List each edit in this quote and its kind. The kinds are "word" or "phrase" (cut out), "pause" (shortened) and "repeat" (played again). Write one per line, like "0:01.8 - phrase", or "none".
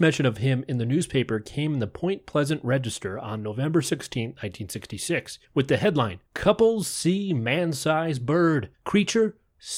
0:05.4 - pause
0:06.3 - pause
0:08.7 - pause